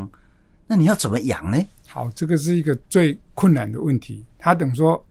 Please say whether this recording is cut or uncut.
uncut